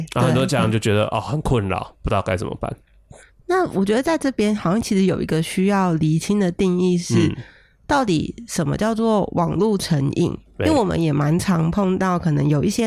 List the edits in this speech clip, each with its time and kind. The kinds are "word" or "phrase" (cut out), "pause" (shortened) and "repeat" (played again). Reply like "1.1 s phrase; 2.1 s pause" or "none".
none